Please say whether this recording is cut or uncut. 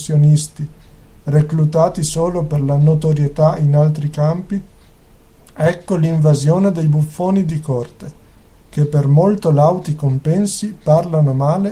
uncut